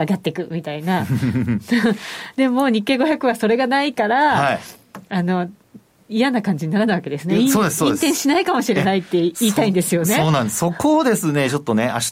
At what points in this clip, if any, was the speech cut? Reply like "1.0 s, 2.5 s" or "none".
none